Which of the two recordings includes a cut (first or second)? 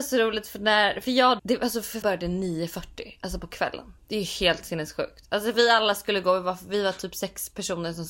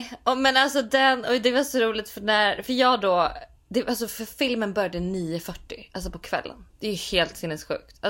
first